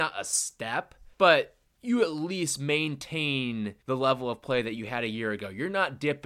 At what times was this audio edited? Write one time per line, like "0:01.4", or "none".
0:01.1
0:03.8